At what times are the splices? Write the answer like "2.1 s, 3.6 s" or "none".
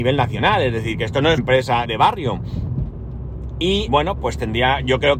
1.4 s, 1.8 s, 3.9 s